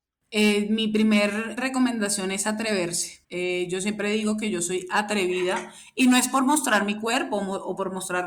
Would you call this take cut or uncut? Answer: cut